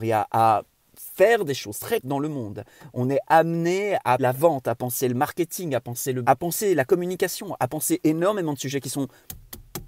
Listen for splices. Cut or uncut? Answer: cut